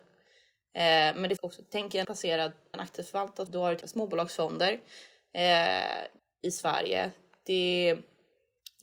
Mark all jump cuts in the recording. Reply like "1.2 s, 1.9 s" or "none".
1.4 s, 2.0 s, 2.7 s, 3.5 s, 3.8 s, 6.2 s